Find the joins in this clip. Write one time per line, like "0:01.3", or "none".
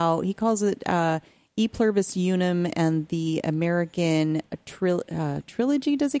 none